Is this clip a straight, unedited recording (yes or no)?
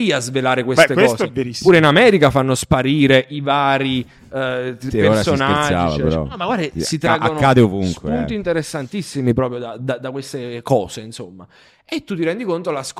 yes